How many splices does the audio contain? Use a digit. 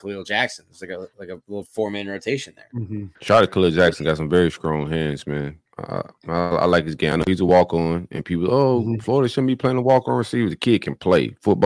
2